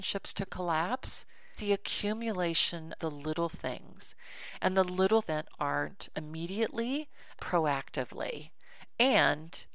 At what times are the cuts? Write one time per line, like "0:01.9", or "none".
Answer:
0:01.6
0:03.0
0:05.2
0:06.1
0:07.4